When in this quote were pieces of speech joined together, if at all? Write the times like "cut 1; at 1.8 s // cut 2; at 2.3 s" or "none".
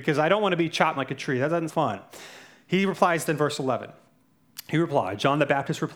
cut 1; at 1.0 s // cut 2; at 1.7 s // cut 3; at 3.3 s